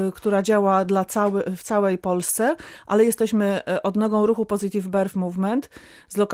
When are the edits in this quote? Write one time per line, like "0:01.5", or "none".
none